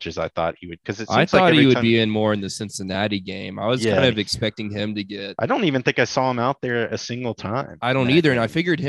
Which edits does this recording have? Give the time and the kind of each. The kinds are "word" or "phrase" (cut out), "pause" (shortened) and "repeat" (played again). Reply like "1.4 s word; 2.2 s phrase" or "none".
none